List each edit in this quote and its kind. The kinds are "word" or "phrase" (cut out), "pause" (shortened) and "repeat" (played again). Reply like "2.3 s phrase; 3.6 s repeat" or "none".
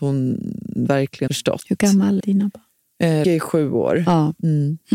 1.3 s word; 2.2 s word; 3.2 s word

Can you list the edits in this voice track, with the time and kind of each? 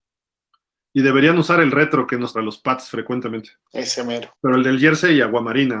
2.3 s phrase; 3.6 s pause; 4.3 s pause

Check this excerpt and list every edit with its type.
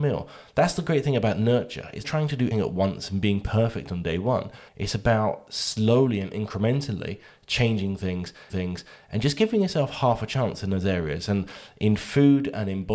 2.0 s word; 2.5 s word; 4.7 s pause; 8.5 s repeat

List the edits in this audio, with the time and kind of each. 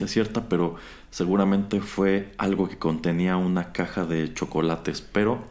none

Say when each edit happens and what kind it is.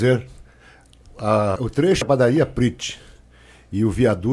1.6 s word; 2.0 s word

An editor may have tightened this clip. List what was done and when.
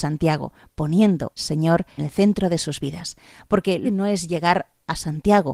1.4 s word; 2.0 s word; 3.8 s word

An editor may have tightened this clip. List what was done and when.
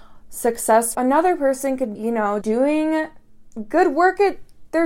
0.9 s word; 1.9 s word; 2.4 s word

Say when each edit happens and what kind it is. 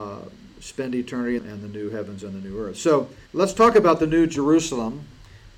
1.4 s phrase; 3.3 s pause

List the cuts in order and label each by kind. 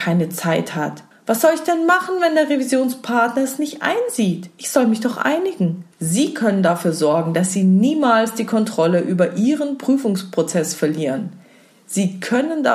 1.1 s pause; 5.9 s pause

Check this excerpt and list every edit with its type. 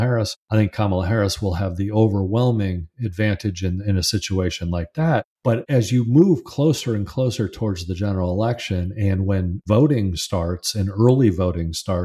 none

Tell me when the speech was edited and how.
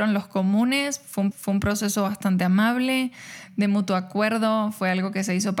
1.3 s repeat

